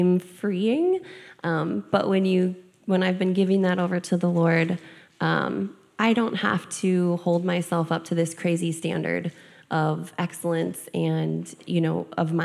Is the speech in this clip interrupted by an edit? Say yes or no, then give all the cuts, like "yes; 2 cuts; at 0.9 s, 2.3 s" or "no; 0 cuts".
no; 0 cuts